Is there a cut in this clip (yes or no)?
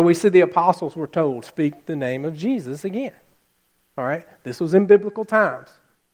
yes